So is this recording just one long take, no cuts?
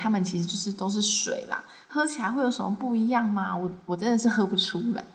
yes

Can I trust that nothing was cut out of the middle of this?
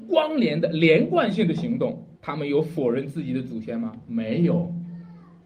no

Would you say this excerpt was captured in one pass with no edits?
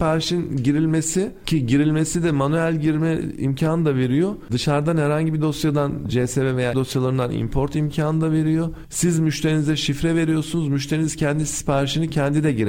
no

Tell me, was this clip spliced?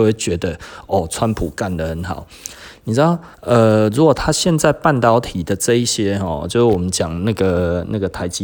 yes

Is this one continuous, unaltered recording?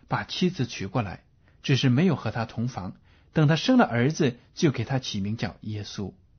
yes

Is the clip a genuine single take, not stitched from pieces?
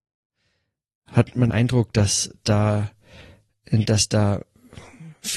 no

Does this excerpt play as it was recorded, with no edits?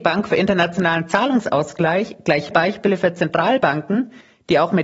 no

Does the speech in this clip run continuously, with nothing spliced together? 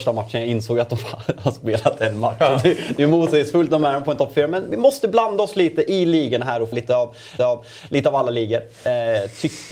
no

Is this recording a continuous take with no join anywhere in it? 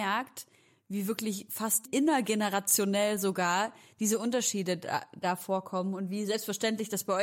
yes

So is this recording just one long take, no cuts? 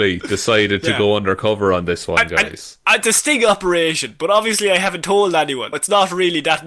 no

